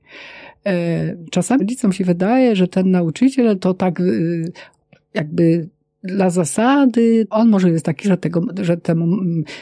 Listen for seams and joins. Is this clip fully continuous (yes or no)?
no